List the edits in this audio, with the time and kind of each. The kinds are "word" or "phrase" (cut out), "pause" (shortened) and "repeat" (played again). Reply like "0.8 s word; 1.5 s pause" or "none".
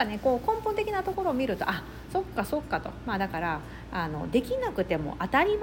none